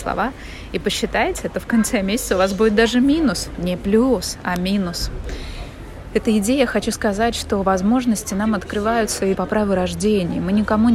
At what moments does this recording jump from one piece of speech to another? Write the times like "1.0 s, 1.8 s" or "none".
9.3 s